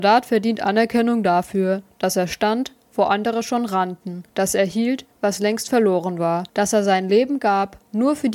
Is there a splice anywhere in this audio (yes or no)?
yes